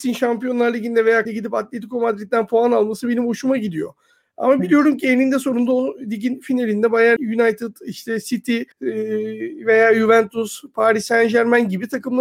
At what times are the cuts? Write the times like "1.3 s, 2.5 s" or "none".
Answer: 1.3 s, 7.2 s, 8.7 s

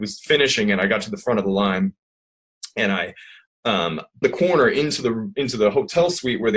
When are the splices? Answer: 4.2 s

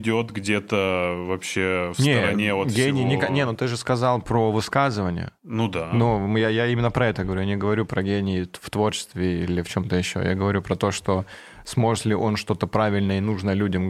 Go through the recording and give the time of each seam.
5.4 s

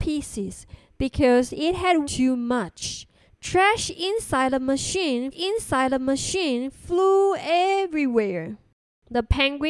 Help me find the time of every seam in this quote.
2.0 s, 3.2 s, 5.3 s

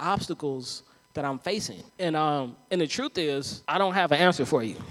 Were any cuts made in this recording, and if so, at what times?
1.9 s, 3.6 s

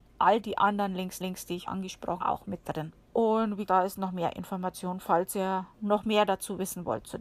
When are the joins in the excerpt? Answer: 1.2 s, 1.7 s, 2.2 s, 3.0 s, 3.7 s, 5.7 s

